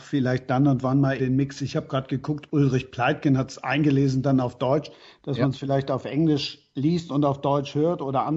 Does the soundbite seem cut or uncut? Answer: cut